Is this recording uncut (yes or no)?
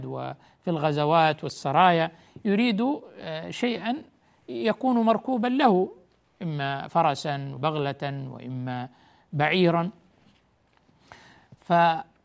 no